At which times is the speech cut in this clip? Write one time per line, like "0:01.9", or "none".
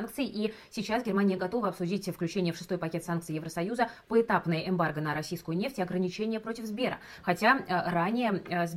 none